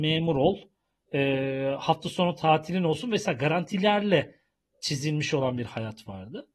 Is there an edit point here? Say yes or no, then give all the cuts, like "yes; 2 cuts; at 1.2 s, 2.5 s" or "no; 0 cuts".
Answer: no; 0 cuts